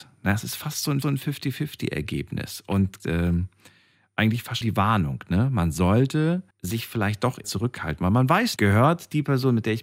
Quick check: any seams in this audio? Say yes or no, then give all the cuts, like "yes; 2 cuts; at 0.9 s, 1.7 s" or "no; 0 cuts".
yes; 6 cuts; at 1.0 s, 3.0 s, 4.6 s, 6.5 s, 7.4 s, 8.6 s